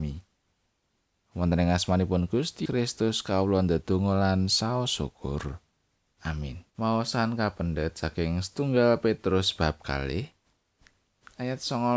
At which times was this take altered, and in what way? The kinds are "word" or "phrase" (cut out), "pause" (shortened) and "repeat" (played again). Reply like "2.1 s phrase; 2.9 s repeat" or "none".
2.7 s word; 6.7 s pause